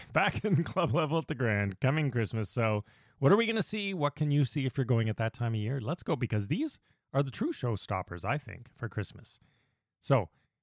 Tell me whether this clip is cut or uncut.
uncut